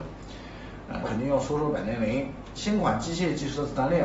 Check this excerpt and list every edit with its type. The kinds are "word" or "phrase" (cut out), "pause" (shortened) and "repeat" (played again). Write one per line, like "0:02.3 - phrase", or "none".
0:01.0 - phrase